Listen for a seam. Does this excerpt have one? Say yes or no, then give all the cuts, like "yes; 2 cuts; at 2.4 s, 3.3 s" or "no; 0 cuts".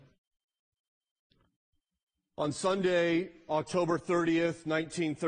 no; 0 cuts